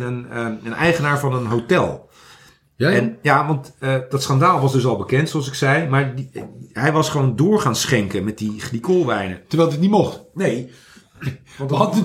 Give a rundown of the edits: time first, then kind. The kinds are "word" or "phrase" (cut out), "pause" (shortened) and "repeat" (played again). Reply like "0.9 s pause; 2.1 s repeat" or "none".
none